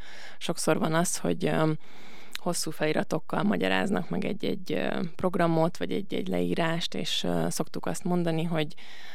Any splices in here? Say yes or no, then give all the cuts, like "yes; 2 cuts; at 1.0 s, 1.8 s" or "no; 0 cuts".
no; 0 cuts